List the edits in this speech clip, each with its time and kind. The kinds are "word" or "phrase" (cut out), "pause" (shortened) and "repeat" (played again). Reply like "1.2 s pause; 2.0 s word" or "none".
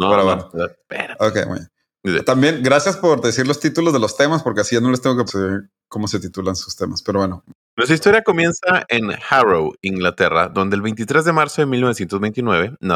5.3 s phrase